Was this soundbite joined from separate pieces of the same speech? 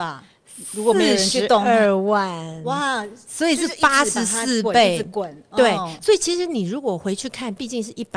no; 0 cuts

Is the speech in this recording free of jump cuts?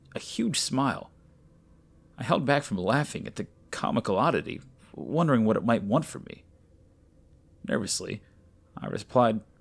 yes; 0 cuts

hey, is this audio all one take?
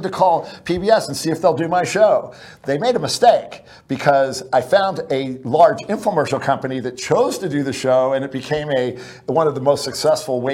yes; 0 cuts

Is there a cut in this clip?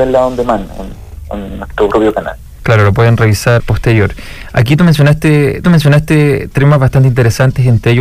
yes; 2 cuts; at 3.6 s, 5.6 s

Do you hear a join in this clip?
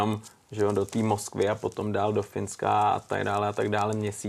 no; 0 cuts

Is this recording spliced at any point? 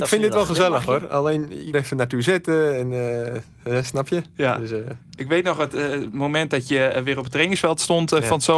yes; 1 cut; at 1.7 s

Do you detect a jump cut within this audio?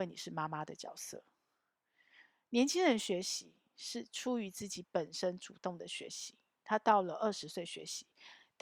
no; 0 cuts

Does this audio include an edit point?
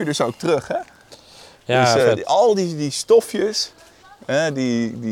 no; 0 cuts

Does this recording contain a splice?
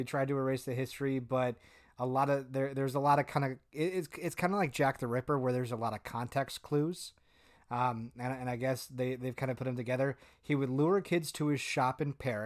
no; 0 cuts

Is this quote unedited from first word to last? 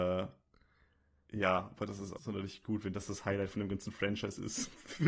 no; 1 cut; at 2.2 s

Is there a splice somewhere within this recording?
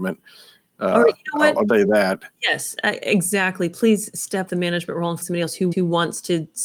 yes; 4 cuts; at 1.7 s, 4.5 s, 5.2 s, 5.7 s

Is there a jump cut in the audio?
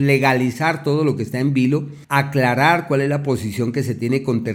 yes; 1 cut; at 2.0 s

